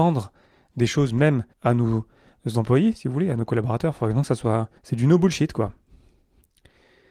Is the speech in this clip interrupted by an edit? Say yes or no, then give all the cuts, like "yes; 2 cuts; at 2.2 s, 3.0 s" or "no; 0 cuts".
yes; 2 cuts; at 1.5 s, 4.8 s